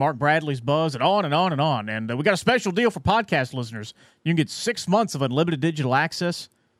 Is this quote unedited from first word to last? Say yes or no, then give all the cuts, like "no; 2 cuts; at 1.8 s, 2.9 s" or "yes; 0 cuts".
yes; 0 cuts